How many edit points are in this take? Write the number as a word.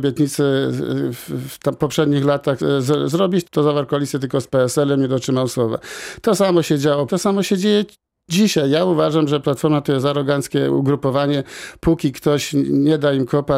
three